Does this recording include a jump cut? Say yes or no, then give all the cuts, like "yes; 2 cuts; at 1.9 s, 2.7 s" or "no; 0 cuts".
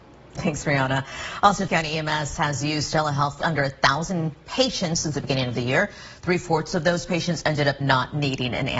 yes; 3 cuts; at 1.7 s, 3.4 s, 7.8 s